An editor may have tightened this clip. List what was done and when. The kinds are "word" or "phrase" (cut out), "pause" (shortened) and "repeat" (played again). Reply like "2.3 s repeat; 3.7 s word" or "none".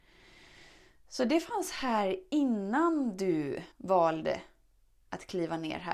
3.7 s pause